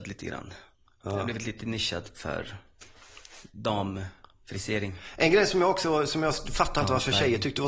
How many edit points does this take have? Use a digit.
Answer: 0